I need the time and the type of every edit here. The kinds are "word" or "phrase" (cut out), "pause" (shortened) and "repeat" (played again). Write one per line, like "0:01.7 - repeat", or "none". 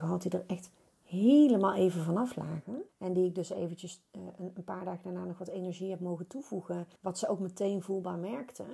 0:02.9 - pause
0:07.0 - pause